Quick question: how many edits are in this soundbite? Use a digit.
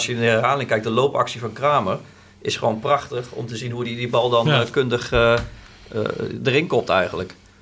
0